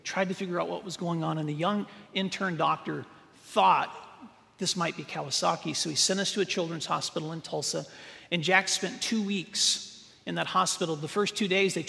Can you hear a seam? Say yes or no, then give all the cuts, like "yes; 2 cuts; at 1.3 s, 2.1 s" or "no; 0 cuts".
no; 0 cuts